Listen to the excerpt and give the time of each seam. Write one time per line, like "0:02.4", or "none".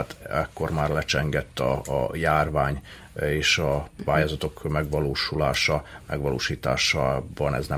none